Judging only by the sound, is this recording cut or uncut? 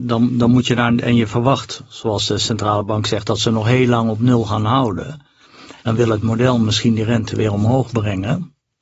cut